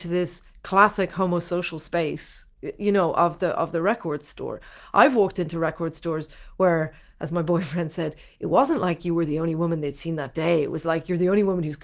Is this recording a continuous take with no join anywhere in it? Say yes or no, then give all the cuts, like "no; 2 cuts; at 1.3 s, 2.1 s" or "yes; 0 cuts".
yes; 0 cuts